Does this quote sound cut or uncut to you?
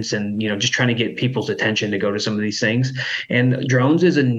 uncut